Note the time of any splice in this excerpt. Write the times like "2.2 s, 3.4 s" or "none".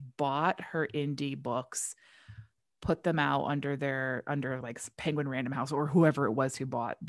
none